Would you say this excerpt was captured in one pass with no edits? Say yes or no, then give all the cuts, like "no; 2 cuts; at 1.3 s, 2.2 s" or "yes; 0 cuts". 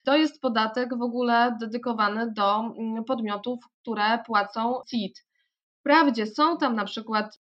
yes; 0 cuts